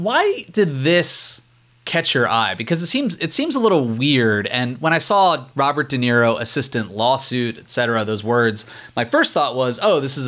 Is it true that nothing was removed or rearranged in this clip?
yes; 0 cuts

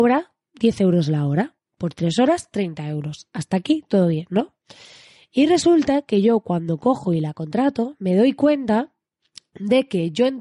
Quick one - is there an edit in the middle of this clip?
no; 0 cuts

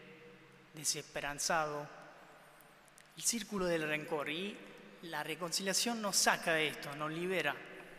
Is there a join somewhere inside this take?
no; 0 cuts

